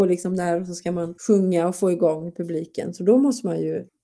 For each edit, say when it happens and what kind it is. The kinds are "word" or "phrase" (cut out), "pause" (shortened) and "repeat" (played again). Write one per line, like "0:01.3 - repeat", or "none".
0:01.2 - pause